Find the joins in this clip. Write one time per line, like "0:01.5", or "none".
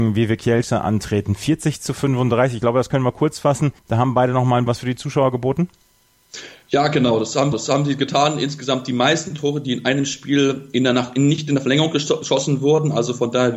0:03.8
0:04.7
0:07.5